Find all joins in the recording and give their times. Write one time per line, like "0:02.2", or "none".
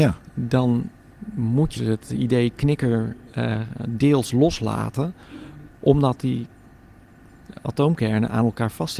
0:01.8
0:03.3
0:05.7

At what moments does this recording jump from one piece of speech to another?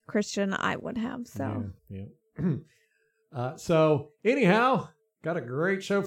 0:01.8

